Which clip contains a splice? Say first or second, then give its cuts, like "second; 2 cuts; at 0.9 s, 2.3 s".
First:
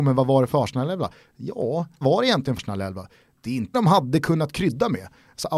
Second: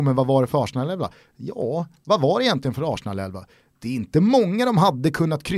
first; 3 cuts; at 2.0 s, 2.6 s, 3.7 s